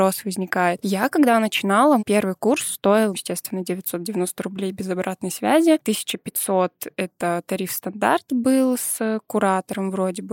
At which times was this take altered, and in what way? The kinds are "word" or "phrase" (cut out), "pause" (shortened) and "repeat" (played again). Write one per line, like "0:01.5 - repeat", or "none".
0:02.0 - word
0:03.1 - word

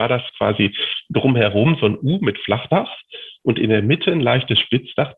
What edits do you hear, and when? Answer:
none

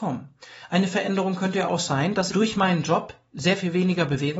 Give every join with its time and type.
0:02.3 - word

